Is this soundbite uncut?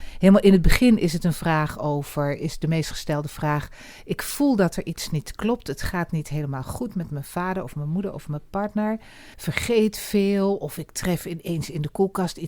no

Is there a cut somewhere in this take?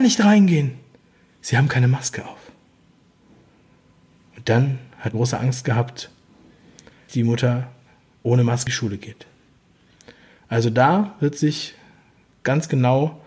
yes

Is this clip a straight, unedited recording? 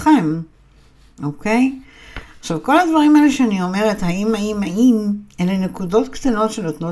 yes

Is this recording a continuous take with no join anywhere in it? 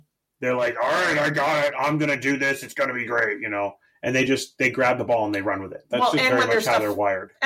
yes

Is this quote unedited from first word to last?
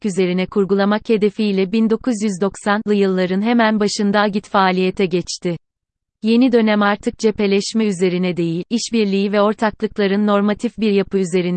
yes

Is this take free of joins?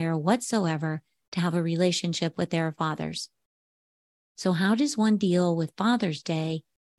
yes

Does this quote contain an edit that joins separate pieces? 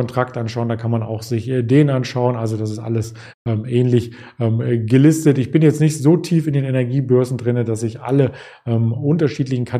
no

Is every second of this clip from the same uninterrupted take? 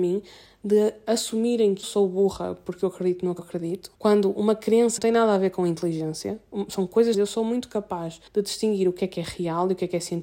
no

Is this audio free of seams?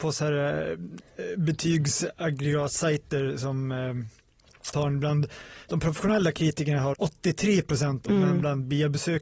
no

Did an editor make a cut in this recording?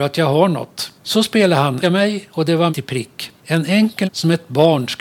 yes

